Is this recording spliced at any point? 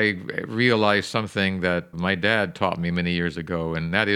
yes; 1 cut; at 1.9 s

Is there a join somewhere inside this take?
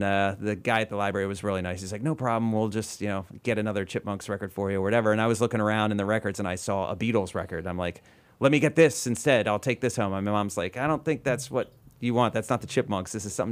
no; 0 cuts

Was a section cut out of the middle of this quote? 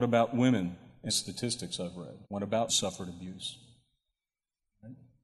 yes; 3 cuts; at 1.1 s, 2.2 s, 2.7 s

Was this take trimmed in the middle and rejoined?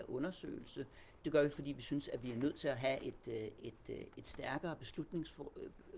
no; 0 cuts

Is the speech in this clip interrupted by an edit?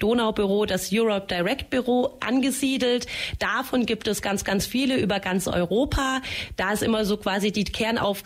no; 0 cuts

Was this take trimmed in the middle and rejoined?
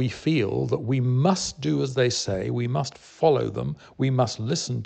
no; 0 cuts

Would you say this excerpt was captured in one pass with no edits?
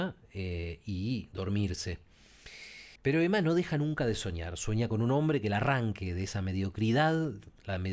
no; 1 cut; at 3.0 s

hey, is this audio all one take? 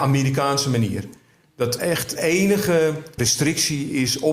no; 3 cuts; at 1.8 s, 2.2 s, 3.2 s

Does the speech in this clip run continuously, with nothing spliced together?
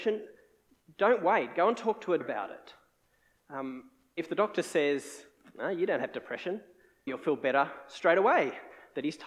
no; 3 cuts; at 2.2 s, 4.2 s, 7.1 s

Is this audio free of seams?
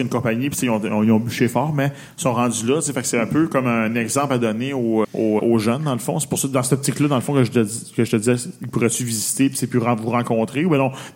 no; 2 cuts; at 5.0 s, 5.4 s

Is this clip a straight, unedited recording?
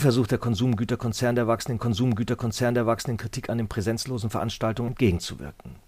no; 2 cuts; at 1.8 s, 4.9 s

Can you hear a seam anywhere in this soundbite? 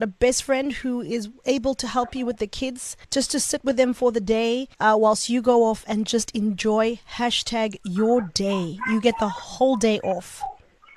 yes; 2 cuts; at 3.0 s, 4.7 s

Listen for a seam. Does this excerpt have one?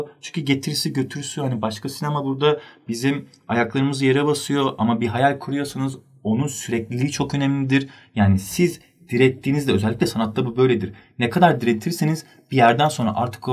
no; 0 cuts

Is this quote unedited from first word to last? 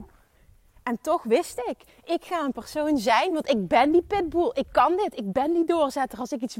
yes; 0 cuts

